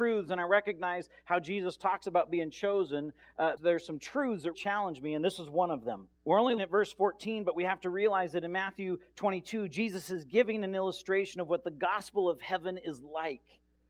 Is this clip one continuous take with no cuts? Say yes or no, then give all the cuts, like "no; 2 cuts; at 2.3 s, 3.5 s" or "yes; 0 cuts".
no; 4 cuts; at 3.6 s, 4.5 s, 6.1 s, 6.6 s